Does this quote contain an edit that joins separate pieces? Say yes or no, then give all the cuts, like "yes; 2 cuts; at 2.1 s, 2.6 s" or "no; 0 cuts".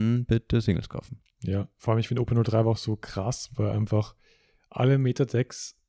no; 0 cuts